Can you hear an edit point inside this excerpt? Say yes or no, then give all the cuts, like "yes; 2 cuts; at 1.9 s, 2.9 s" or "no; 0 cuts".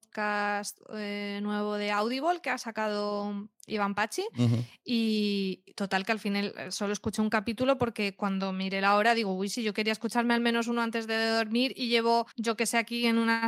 yes; 1 cut; at 12.3 s